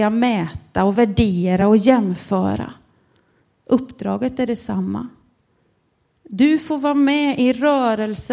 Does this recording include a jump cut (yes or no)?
no